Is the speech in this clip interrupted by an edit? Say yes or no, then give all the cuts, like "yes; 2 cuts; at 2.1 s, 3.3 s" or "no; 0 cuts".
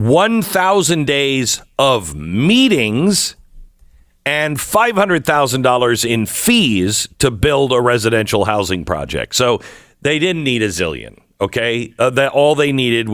no; 0 cuts